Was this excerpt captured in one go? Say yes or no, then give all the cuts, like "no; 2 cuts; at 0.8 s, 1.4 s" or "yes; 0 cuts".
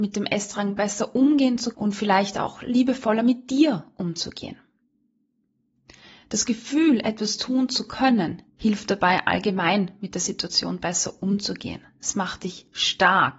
no; 2 cuts; at 1.7 s, 8.5 s